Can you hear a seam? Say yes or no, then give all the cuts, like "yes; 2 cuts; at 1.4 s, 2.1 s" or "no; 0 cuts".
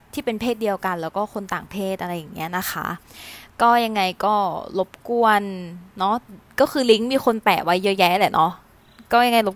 yes; 1 cut; at 5.9 s